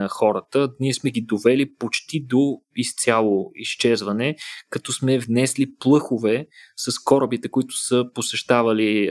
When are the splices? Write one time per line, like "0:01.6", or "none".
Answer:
none